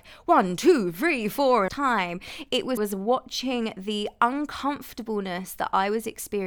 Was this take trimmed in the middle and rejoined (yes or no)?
yes